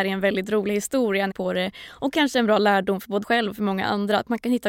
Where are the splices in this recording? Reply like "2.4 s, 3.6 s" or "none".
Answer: 1.3 s, 3.2 s

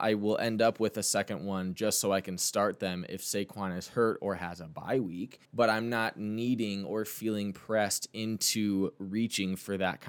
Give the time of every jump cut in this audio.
5.4 s

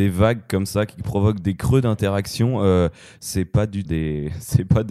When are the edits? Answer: 3.9 s

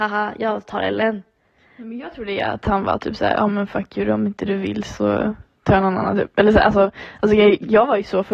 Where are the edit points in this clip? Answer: none

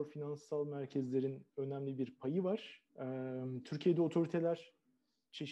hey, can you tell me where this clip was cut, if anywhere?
1.5 s, 2.9 s

